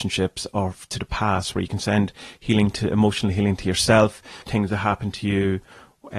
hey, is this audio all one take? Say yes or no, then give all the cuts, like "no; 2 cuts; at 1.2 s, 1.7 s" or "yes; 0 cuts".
no; 1 cut; at 4.4 s